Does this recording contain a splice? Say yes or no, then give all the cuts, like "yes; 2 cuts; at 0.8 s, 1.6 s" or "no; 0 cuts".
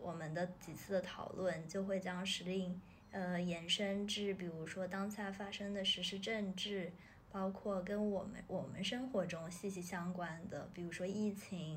yes; 1 cut; at 3.0 s